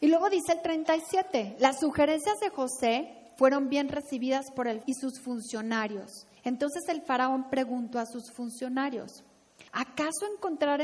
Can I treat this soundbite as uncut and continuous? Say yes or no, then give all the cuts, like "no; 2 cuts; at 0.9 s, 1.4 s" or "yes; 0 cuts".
no; 3 cuts; at 4.8 s, 6.4 s, 9.7 s